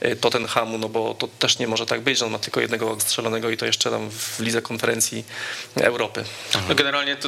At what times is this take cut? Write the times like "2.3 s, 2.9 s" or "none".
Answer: 3.0 s